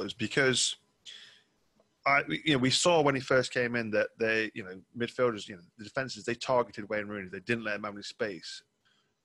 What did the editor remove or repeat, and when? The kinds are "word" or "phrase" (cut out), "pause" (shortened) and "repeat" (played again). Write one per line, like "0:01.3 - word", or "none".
none